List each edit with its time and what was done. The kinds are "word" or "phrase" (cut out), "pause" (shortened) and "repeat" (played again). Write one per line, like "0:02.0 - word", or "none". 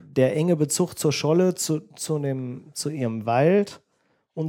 none